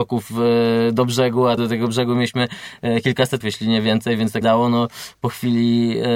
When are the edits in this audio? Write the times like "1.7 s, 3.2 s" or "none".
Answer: 1.6 s, 3.4 s, 4.4 s